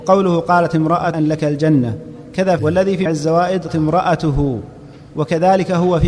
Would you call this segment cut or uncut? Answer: cut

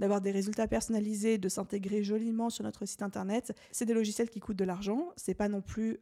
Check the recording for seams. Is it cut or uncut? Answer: uncut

